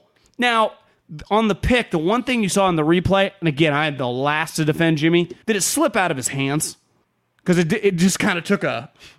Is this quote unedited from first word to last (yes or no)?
no